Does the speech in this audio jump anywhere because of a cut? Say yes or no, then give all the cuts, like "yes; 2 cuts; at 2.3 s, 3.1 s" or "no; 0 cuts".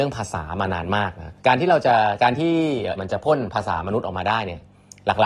yes; 2 cuts; at 1.4 s, 3.0 s